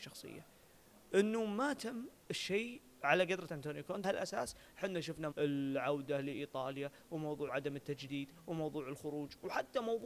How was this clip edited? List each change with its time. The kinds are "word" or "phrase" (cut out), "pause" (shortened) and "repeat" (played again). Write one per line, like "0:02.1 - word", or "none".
0:02.2 - pause
0:03.5 - word
0:04.0 - word
0:05.3 - word
0:07.5 - word

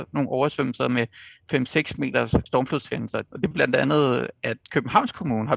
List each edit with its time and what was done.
0:02.5 - word
0:03.5 - word

